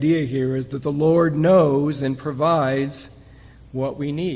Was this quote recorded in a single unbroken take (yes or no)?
yes